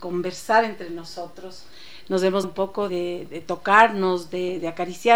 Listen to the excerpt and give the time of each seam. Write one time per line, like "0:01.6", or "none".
0:02.4
0:02.9
0:03.3